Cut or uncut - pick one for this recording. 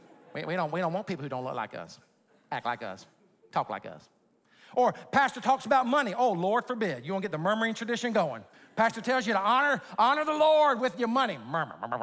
cut